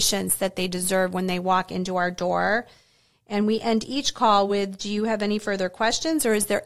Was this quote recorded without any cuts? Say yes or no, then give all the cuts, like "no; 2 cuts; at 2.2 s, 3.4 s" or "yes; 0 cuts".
yes; 0 cuts